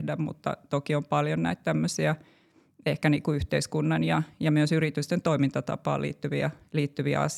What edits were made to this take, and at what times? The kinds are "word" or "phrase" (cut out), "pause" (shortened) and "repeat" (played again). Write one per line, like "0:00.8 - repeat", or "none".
none